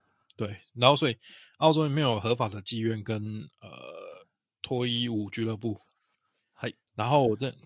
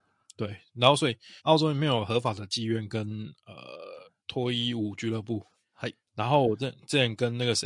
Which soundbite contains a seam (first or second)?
second